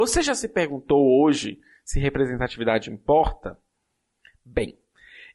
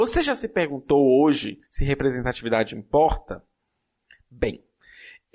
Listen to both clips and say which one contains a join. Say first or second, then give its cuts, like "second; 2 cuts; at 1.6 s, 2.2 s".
second; 1 cut; at 1.6 s